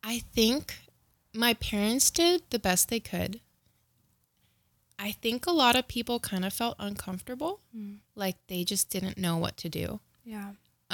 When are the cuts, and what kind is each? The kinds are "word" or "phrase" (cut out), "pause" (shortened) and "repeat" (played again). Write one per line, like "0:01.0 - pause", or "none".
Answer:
0:01.1 - pause
0:02.5 - pause
0:08.1 - pause